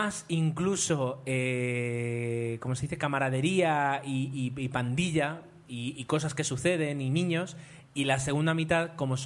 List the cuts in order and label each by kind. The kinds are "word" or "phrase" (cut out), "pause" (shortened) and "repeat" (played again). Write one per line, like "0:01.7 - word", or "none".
none